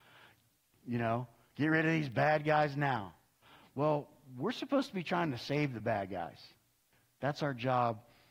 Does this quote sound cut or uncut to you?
uncut